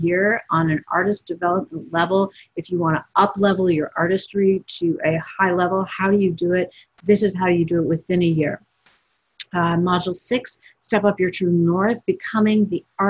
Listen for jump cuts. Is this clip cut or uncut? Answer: uncut